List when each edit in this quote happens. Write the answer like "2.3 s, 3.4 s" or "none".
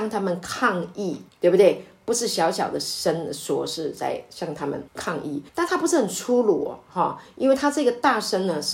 1.3 s, 4.9 s, 5.5 s